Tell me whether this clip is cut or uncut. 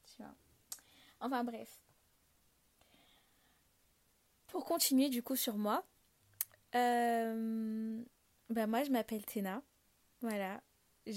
uncut